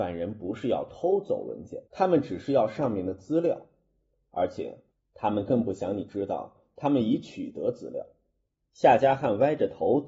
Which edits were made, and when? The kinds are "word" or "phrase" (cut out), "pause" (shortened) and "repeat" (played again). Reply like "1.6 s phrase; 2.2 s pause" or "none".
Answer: 1.9 s pause